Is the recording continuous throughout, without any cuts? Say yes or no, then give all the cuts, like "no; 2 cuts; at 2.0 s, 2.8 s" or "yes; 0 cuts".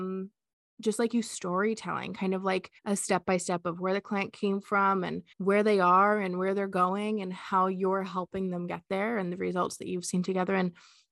no; 2 cuts; at 2.8 s, 5.3 s